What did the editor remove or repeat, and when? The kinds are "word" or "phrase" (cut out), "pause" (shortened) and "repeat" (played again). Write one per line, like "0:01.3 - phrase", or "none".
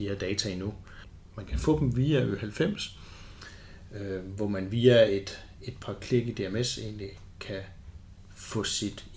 none